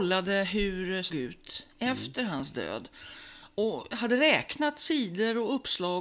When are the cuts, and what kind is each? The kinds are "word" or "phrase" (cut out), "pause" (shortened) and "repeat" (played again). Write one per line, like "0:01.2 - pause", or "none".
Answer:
0:01.1 - phrase